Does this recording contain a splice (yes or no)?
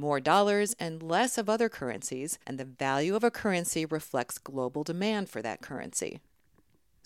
yes